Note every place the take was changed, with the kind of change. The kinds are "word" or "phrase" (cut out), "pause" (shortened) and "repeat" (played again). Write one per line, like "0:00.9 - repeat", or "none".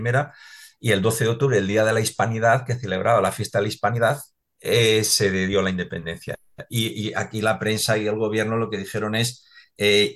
none